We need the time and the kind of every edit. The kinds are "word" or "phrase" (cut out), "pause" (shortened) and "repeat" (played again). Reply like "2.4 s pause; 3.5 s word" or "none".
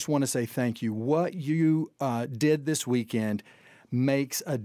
none